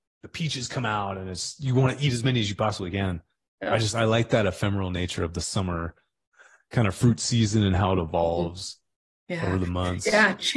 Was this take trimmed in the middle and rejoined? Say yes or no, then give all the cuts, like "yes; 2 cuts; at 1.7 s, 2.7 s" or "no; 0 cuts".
no; 0 cuts